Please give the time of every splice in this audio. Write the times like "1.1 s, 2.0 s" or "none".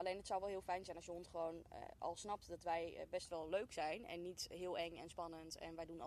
none